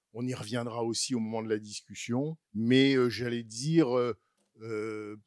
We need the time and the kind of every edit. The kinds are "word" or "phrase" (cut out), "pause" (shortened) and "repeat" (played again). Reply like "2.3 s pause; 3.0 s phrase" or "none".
2.4 s pause